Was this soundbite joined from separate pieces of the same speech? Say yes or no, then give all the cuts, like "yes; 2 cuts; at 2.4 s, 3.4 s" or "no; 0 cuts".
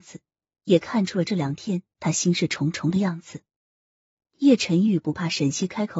no; 0 cuts